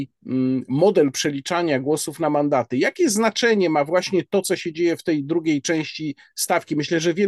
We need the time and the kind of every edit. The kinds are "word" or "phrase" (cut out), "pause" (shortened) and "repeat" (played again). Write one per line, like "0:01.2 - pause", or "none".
none